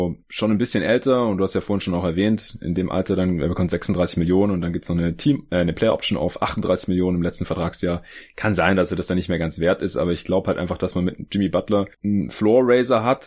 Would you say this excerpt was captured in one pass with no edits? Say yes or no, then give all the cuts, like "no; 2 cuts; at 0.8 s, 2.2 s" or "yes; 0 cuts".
yes; 0 cuts